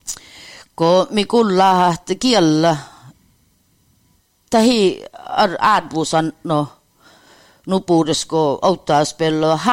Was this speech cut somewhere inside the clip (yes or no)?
no